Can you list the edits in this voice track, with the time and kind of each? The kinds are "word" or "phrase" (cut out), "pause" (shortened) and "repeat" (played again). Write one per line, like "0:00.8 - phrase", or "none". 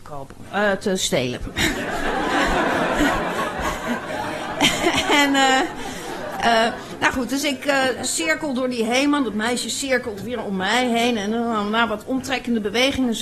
none